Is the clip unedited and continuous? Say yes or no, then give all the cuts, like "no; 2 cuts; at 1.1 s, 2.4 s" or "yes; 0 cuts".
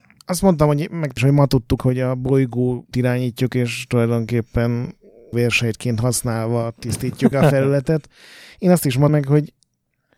no; 6 cuts; at 1.2 s, 1.8 s, 2.9 s, 5.3 s, 7.3 s, 9.1 s